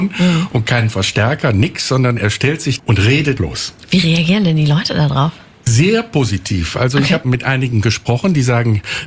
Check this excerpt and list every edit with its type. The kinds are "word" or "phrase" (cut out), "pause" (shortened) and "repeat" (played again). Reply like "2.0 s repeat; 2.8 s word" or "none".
2.8 s word; 3.4 s word; 7.2 s word

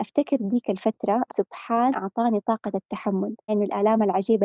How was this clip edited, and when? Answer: 1.3 s word; 1.9 s word; 3.5 s word

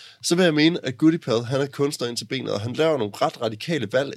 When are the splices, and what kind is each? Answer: none

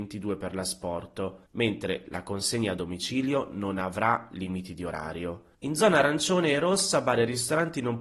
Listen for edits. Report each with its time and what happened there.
1.5 s pause; 5.5 s pause

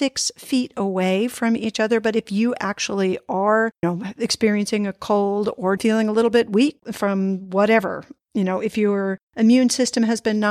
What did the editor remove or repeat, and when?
3.8 s word; 5.8 s word

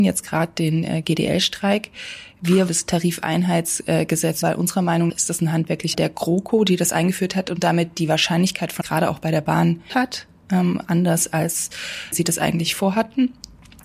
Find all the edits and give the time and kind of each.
2.7 s word; 4.4 s word; 5.1 s word; 5.9 s word; 8.8 s word; 9.9 s word; 12.1 s word

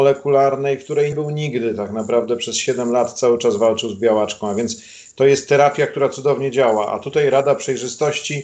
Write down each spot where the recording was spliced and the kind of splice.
1.1 s word

